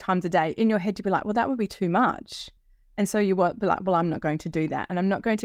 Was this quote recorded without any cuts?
yes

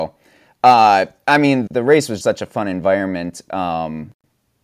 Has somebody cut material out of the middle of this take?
yes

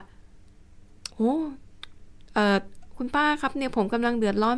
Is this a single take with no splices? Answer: no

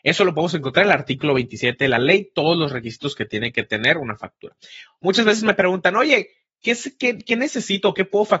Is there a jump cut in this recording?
no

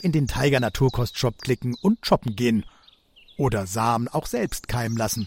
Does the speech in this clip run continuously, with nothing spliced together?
yes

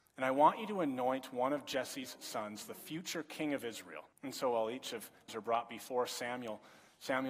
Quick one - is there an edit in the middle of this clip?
yes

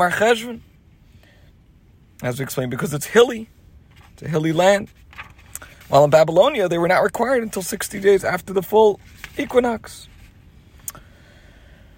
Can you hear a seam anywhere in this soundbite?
no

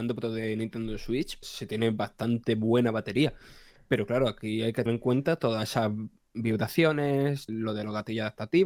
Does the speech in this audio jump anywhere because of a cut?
yes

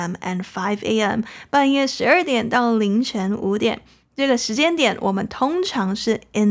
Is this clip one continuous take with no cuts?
yes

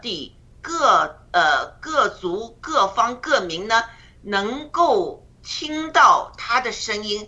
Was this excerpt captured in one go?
no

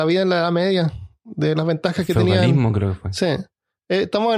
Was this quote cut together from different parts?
no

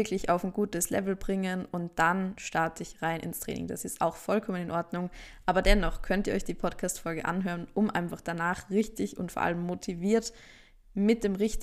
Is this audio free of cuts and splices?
yes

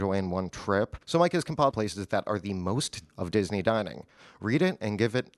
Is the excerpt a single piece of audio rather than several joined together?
no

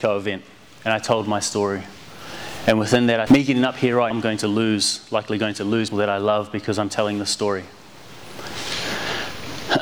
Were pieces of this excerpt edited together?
yes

